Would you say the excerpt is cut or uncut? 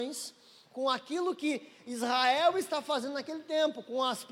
uncut